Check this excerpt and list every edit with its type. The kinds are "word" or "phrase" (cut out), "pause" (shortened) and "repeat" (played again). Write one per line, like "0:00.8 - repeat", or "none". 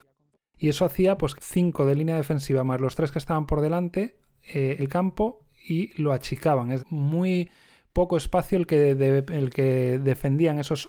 0:01.4 - phrase
0:04.8 - word
0:06.8 - phrase